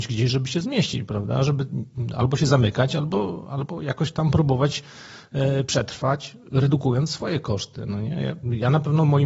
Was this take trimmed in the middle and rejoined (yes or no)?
no